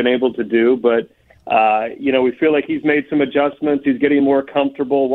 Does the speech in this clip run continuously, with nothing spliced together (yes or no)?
yes